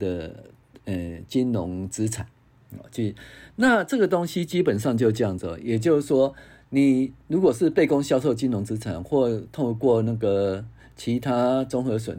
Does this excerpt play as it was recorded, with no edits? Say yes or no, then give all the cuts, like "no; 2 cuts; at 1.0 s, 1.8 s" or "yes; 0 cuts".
yes; 0 cuts